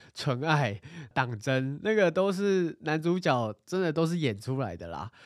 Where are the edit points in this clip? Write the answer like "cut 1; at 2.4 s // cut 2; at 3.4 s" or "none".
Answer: cut 1; at 1.1 s